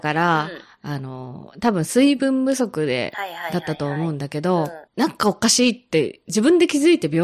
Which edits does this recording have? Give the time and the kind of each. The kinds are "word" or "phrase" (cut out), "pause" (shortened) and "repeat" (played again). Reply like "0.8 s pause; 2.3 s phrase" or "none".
4.9 s pause